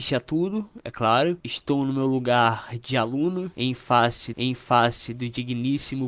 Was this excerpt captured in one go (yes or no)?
no